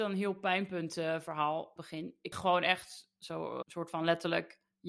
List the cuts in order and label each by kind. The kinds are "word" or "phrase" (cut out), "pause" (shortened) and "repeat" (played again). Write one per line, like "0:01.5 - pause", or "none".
0:01.8 - phrase
0:02.3 - phrase
0:03.6 - word